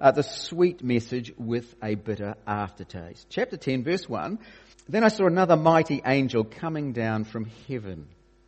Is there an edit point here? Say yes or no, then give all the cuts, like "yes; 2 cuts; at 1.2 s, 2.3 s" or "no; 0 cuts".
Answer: yes; 1 cut; at 4.7 s